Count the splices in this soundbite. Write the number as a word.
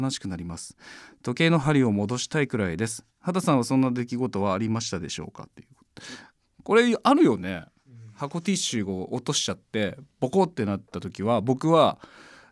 zero